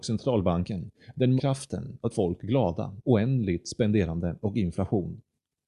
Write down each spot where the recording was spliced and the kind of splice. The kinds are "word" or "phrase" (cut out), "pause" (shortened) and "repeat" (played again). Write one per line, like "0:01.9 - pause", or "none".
0:01.4 - word
0:02.1 - word
0:03.0 - word